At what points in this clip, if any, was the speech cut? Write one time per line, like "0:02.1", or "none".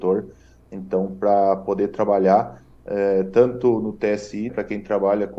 0:04.5